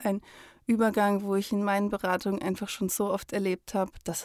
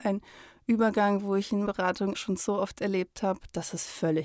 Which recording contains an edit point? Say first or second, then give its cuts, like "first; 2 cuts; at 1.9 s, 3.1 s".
second; 2 cuts; at 1.7 s, 2.1 s